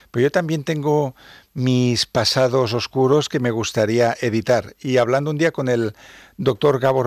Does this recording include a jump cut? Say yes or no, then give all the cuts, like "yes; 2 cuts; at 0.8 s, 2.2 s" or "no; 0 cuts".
no; 0 cuts